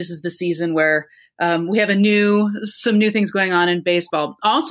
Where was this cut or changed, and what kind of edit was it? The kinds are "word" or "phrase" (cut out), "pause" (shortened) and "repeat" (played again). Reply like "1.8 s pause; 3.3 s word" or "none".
none